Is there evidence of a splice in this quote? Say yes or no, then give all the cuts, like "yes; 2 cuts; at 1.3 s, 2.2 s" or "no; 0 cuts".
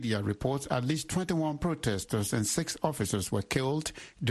no; 0 cuts